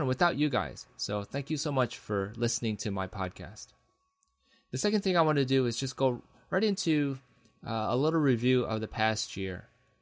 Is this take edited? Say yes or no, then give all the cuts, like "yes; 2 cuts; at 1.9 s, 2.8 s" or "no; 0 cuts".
no; 0 cuts